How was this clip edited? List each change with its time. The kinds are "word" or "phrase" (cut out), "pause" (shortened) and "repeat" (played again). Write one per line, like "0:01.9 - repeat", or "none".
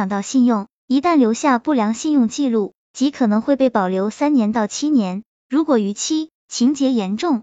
0:06.4 - pause